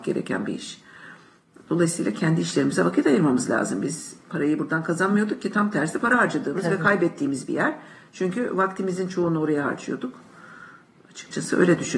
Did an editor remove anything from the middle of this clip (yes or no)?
no